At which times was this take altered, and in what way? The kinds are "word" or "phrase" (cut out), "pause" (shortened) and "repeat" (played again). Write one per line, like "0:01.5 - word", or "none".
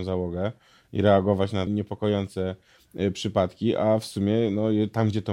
0:01.7 - phrase